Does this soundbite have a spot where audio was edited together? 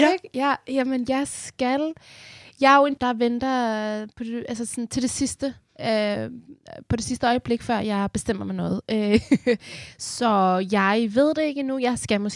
yes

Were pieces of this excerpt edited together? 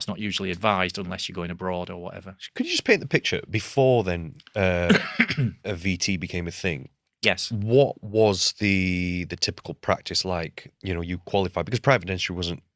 no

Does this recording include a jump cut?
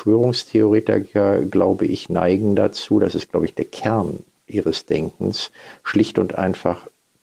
no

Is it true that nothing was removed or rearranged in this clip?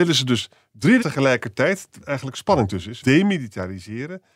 no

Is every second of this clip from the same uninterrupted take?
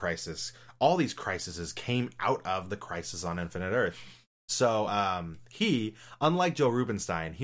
yes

